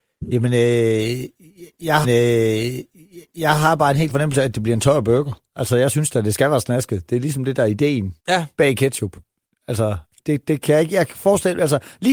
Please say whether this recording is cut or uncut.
cut